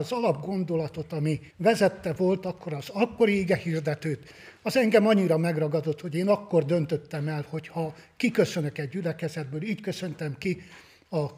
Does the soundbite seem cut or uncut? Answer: cut